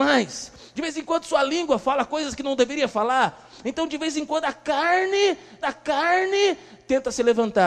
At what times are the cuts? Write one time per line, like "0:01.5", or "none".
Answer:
0:05.6